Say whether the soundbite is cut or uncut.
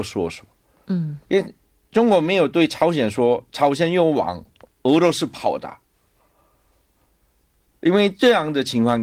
uncut